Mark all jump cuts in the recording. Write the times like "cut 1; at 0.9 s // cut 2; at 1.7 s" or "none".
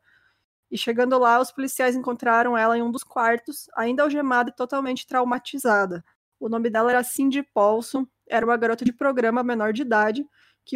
cut 1; at 6.2 s